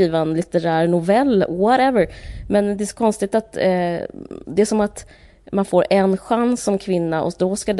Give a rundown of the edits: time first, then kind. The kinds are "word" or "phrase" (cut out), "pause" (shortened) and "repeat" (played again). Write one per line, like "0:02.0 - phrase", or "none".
none